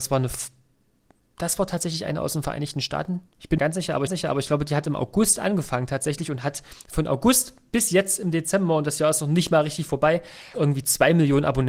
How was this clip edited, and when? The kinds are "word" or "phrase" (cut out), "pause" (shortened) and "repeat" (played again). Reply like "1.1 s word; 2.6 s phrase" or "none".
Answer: 3.6 s phrase; 4.1 s repeat; 10.5 s word